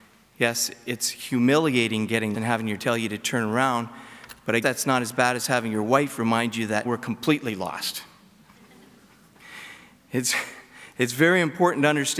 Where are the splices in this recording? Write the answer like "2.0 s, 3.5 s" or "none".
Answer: 2.3 s, 2.8 s, 4.6 s, 6.8 s